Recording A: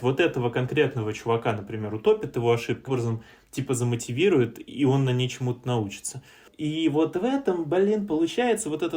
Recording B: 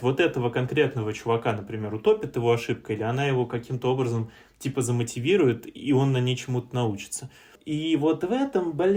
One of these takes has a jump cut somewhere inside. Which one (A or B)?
A